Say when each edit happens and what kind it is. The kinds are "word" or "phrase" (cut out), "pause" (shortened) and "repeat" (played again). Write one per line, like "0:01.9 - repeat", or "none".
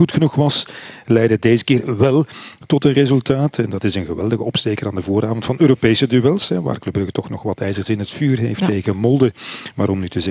none